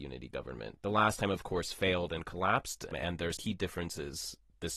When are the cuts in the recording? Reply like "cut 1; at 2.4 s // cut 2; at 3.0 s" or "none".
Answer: cut 1; at 2.9 s // cut 2; at 3.4 s